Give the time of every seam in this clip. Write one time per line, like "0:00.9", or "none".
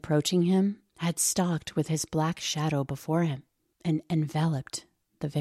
none